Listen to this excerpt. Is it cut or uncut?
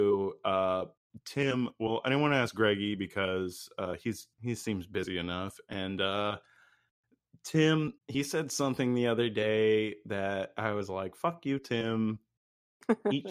cut